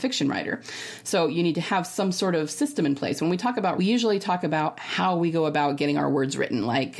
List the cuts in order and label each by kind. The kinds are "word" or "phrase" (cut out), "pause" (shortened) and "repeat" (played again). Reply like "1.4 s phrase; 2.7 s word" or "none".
3.8 s phrase